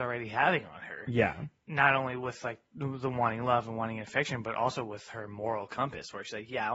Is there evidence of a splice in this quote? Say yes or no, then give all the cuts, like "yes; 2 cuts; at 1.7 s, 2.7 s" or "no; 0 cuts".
no; 0 cuts